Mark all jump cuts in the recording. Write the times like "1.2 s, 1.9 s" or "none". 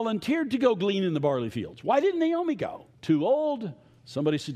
2.9 s